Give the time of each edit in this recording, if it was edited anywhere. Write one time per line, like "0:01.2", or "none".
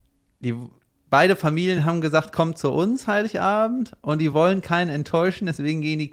none